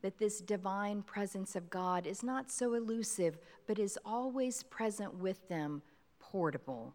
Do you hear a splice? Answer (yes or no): no